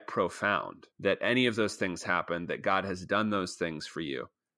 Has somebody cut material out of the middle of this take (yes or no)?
yes